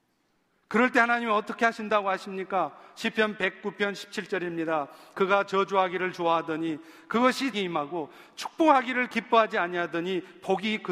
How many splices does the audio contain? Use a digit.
1